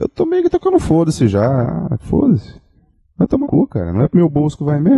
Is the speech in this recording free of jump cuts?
no; 3 cuts; at 2.0 s, 2.8 s, 3.4 s

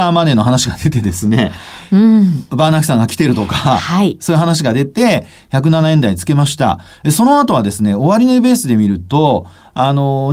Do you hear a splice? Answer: no; 0 cuts

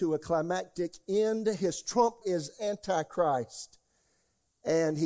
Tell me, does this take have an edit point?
yes; 1 cut; at 2.2 s

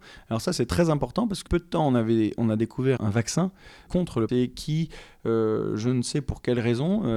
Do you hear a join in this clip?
yes; 4 cuts; at 1.5 s, 3.0 s, 3.9 s, 4.3 s

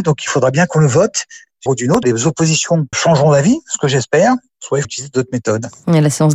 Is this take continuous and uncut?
no; 4 cuts; at 1.7 s, 2.0 s, 2.9 s, 4.8 s

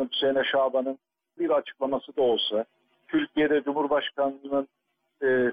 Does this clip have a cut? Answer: yes; 1 cut; at 1.4 s

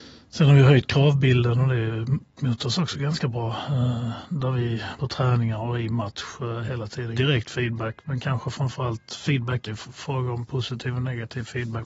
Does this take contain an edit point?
yes; 3 cuts; at 5.0 s, 7.1 s, 9.7 s

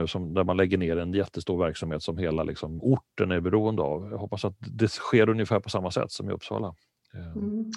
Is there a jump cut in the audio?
no; 0 cuts

